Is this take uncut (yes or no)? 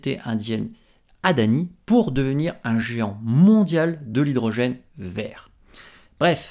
yes